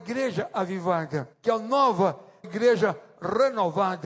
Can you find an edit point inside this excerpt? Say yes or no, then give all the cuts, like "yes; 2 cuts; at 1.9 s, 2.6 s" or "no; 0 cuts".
yes; 2 cuts; at 1.3 s, 2.4 s